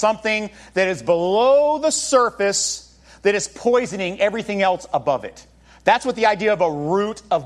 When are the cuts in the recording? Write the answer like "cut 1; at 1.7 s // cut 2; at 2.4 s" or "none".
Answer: none